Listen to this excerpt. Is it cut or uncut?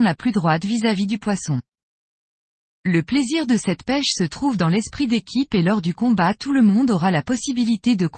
uncut